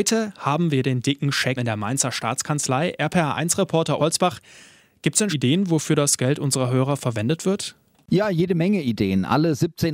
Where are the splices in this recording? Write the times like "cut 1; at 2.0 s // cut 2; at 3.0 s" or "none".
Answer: cut 1; at 1.6 s // cut 2; at 4.0 s // cut 3; at 5.3 s